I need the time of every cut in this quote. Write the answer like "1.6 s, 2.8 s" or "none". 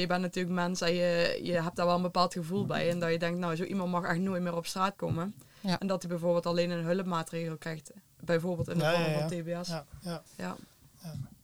10.3 s